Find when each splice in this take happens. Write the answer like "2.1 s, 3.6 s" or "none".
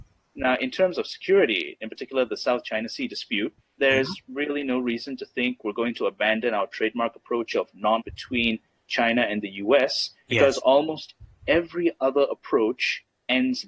3.6 s, 8.0 s, 10.2 s